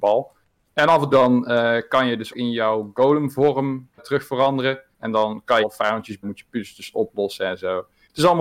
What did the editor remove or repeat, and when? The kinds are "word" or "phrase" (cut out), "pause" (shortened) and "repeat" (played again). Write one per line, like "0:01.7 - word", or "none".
0:01.1 - word
0:02.3 - word
0:04.0 - word
0:04.9 - pause
0:05.6 - phrase
0:06.2 - phrase